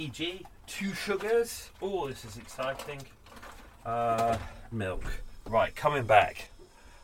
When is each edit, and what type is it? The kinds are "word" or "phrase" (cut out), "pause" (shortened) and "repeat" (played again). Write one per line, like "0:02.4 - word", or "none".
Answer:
0:01.7 - pause
0:04.7 - phrase